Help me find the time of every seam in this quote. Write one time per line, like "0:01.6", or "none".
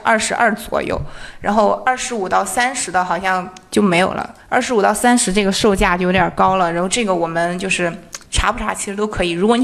0:04.4
0:08.3